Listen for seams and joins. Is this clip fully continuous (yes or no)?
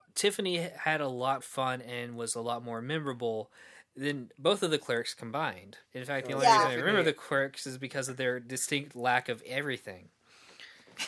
no